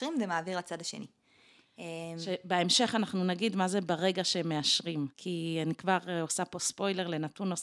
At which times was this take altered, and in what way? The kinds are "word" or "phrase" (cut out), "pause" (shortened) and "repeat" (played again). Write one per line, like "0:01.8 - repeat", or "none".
0:05.1 - pause